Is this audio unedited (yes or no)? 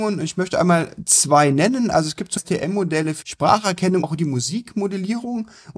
no